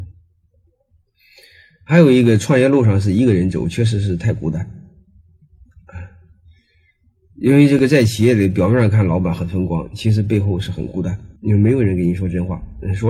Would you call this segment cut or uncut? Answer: cut